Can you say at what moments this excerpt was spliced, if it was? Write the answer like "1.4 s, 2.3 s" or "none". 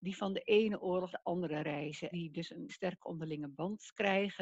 1.1 s, 2.1 s, 2.7 s